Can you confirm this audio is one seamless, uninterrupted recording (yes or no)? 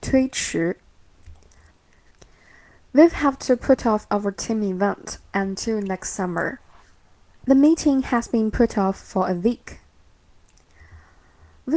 no